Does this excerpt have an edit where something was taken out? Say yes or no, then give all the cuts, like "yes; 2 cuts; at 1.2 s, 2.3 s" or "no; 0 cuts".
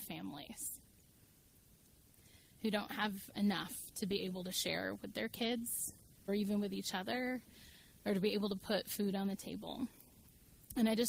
yes; 1 cut; at 6.3 s